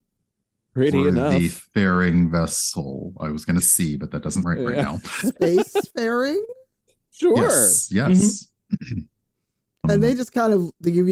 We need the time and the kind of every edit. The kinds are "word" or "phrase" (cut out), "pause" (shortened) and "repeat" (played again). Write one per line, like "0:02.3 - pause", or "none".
0:03.6 - word
0:04.4 - word
0:09.8 - word

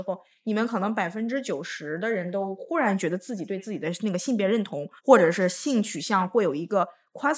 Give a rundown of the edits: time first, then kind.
0:05.0 - pause

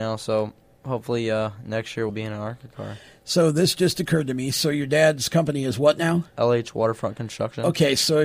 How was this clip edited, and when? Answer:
0:02.1 - word

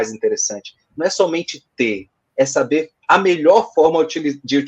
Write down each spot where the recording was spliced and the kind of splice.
none

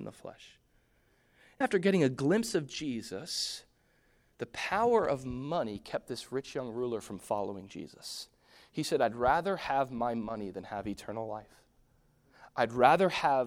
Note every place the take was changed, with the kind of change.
0:01.6 - word

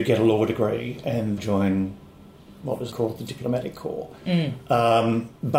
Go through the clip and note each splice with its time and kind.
0:01.4 - phrase
0:02.9 - word

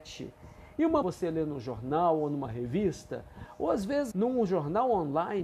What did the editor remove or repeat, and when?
0:01.0 - phrase
0:04.1 - word

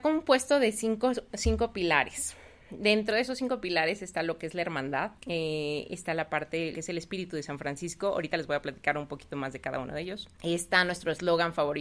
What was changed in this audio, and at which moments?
0:05.2 - pause
0:06.7 - word
0:10.3 - pause

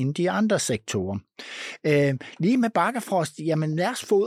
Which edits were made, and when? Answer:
none

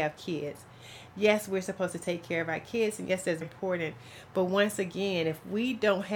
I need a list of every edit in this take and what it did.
0:03.4 - word

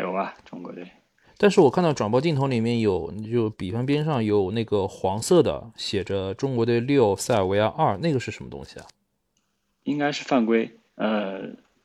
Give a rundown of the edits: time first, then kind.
0:10.9 - pause

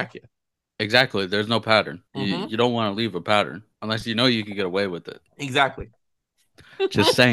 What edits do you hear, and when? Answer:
0:02.1 - pause
0:03.7 - pause
0:05.3 - pause

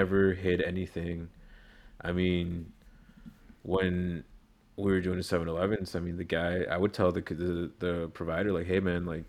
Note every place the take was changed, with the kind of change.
none

